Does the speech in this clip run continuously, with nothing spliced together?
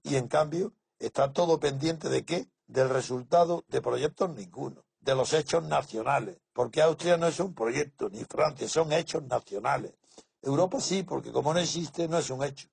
no; 3 cuts; at 2.6 s, 4.9 s, 6.5 s

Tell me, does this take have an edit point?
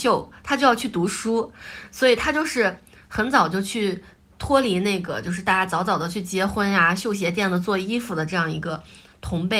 no; 0 cuts

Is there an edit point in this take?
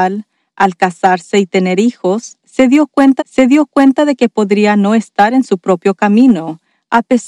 yes; 1 cut; at 3.2 s

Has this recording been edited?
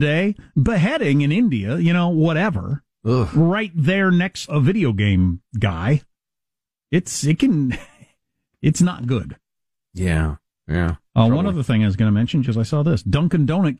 yes; 2 cuts; at 4.5 s, 12.4 s

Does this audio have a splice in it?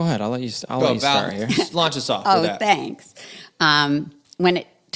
no; 0 cuts

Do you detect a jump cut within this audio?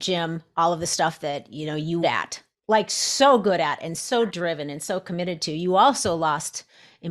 yes; 1 cut; at 2.0 s

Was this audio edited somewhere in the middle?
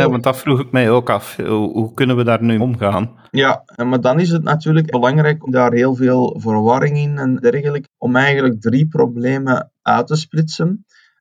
yes; 6 cuts; at 2.6 s, 3.3 s, 4.9 s, 5.5 s, 7.4 s, 7.9 s

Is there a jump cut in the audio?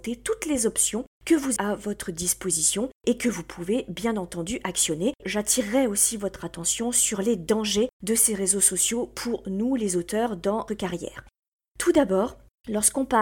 yes; 3 cuts; at 1.6 s, 5.2 s, 10.7 s

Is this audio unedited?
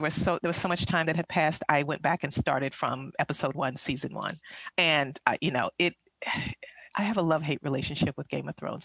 yes; 0 cuts

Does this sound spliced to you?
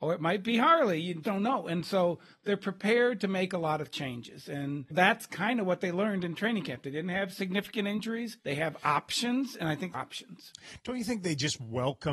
yes; 4 cuts; at 1.2 s, 4.9 s, 8.4 s, 9.9 s

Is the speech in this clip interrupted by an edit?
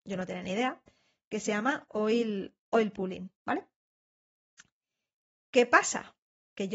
yes; 1 cut; at 3.4 s

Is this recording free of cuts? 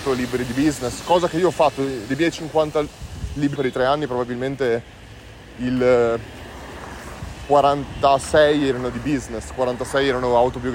no; 1 cut; at 3.6 s

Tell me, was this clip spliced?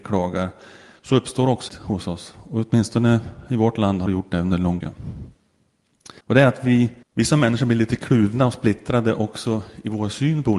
yes; 5 cuts; at 1.7 s, 4.1 s, 4.8 s, 6.2 s, 7.0 s

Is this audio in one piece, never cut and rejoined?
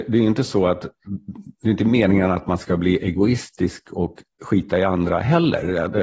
yes; 0 cuts

